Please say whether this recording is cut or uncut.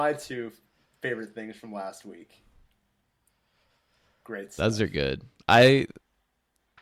uncut